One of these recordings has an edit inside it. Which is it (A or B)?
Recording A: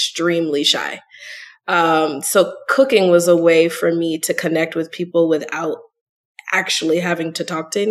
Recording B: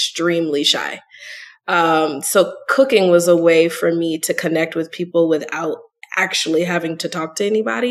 B